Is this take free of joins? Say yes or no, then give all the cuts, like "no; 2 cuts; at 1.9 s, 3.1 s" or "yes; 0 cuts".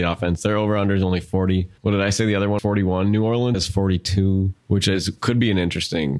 no; 4 cuts; at 1.8 s, 2.6 s, 3.5 s, 4.6 s